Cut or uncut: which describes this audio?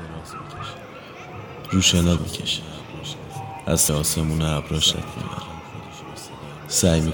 cut